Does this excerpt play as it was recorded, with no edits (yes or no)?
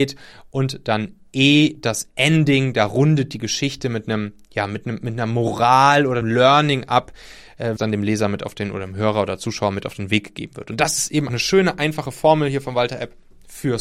no